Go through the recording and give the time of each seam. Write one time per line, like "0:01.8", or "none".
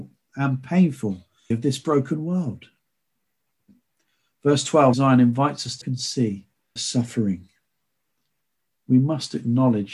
0:01.5
0:04.9
0:05.8
0:06.8